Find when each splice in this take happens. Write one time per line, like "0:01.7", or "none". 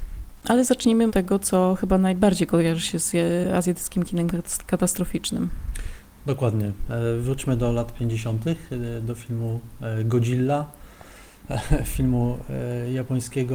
0:01.1

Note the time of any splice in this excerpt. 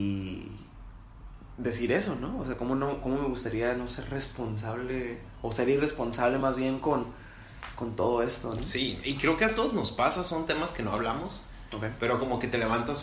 none

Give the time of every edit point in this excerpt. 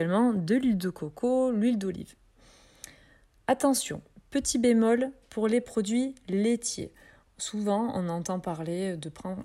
0:04.1

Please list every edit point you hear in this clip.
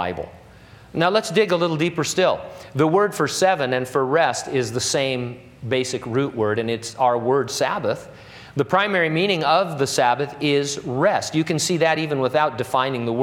none

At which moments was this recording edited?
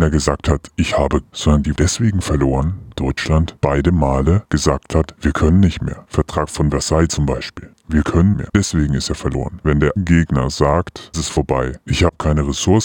0:01.2
0:01.7
0:03.0
0:08.3
0:10.0
0:11.1

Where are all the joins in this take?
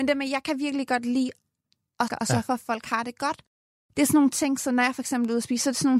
0:02.1

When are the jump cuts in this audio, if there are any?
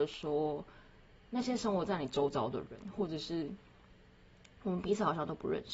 none

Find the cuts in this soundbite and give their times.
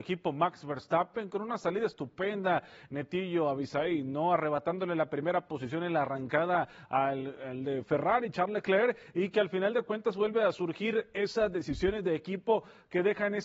none

